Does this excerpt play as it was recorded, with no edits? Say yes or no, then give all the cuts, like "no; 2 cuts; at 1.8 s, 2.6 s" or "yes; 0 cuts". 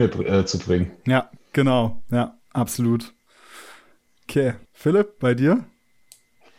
no; 1 cut; at 4.7 s